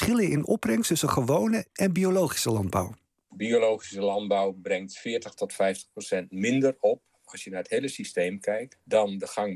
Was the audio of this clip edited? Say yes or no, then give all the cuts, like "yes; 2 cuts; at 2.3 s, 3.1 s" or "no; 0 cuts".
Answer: no; 0 cuts